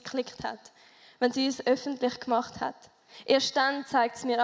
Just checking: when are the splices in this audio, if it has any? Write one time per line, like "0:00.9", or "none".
none